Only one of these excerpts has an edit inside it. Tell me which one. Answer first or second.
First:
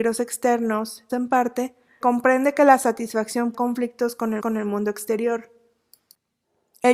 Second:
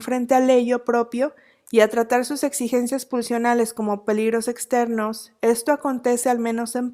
first